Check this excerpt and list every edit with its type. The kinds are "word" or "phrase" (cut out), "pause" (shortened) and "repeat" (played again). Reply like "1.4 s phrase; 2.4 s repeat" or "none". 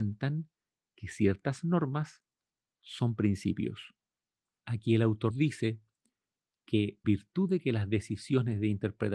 5.3 s word; 7.0 s word